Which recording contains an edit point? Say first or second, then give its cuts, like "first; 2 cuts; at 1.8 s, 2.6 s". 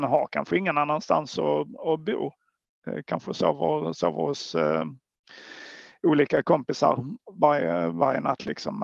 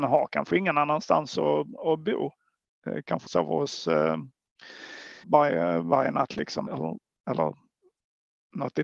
second; 3 cuts; at 3.3 s, 5.2 s, 6.7 s